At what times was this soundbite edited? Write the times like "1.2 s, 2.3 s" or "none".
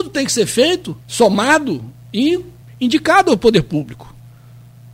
1.0 s, 2.6 s